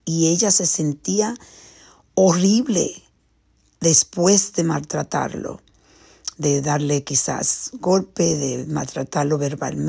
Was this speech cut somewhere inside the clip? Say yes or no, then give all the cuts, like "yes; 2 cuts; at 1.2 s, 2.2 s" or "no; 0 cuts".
no; 0 cuts